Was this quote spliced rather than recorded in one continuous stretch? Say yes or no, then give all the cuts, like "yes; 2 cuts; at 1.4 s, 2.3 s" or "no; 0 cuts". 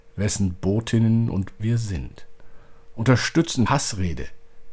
yes; 2 cuts; at 1.6 s, 3.7 s